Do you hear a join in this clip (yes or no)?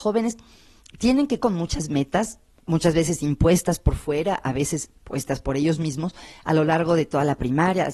yes